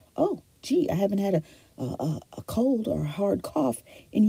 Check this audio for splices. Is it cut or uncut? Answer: uncut